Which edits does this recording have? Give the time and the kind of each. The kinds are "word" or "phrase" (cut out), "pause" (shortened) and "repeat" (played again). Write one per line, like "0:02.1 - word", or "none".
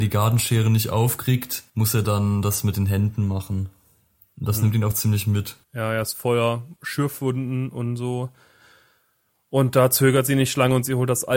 0:01.7 - pause
0:05.6 - pause
0:06.8 - pause